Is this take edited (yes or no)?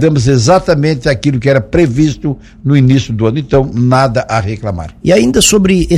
no